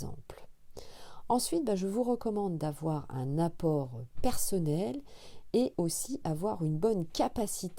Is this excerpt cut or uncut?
uncut